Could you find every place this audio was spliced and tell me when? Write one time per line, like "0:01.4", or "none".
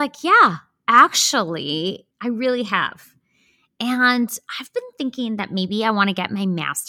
0:02.1